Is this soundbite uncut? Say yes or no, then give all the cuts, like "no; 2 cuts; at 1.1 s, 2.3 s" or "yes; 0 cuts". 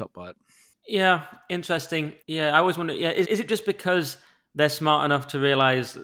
no; 2 cuts; at 2.2 s, 3.2 s